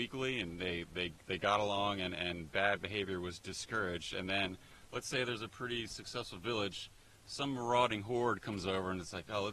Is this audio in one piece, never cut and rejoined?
yes; 0 cuts

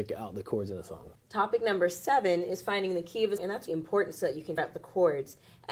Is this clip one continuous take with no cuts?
no; 4 cuts; at 1.2 s, 3.4 s, 3.7 s, 4.6 s

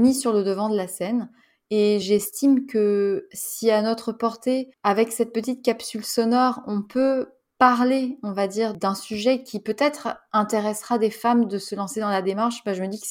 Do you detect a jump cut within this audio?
no; 0 cuts

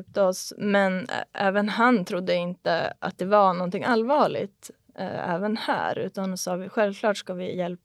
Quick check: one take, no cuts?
yes; 0 cuts

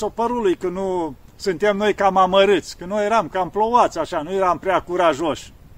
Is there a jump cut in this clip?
no; 0 cuts

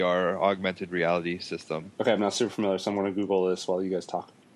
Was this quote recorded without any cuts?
yes; 0 cuts

